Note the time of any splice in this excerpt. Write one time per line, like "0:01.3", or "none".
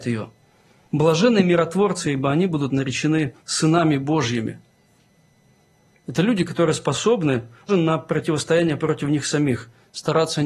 0:03.4
0:07.7